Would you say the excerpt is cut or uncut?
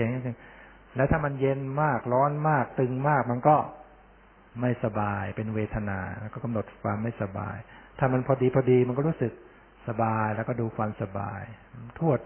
uncut